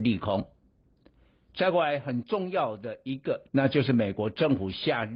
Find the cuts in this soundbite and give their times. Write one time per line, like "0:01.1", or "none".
0:03.5